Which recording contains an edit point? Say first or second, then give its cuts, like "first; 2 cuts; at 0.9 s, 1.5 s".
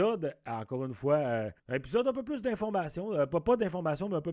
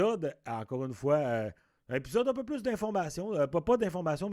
first; 1 cut; at 1.6 s